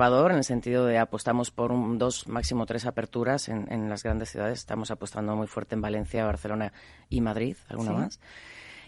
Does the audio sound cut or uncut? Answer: uncut